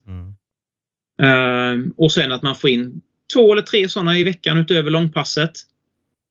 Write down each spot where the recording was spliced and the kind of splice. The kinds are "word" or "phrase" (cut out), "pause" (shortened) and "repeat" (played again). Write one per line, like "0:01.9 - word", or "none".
none